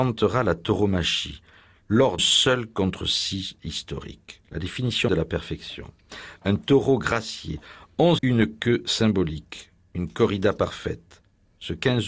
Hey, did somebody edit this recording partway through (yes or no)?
yes